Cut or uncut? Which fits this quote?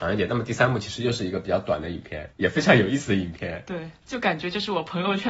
cut